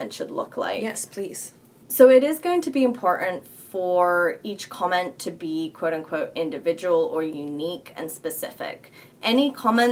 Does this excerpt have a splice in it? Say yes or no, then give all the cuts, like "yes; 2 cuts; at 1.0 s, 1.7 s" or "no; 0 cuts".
no; 0 cuts